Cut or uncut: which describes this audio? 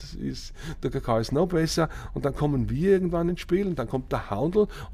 uncut